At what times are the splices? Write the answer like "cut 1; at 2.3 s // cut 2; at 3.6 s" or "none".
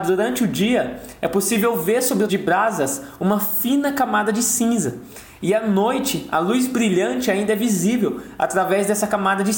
cut 1; at 2.3 s